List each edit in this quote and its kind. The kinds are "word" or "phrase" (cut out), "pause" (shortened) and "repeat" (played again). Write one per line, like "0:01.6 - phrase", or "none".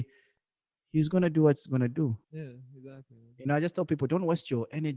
0:02.2 - pause